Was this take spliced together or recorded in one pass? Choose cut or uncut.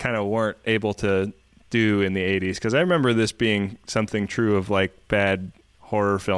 uncut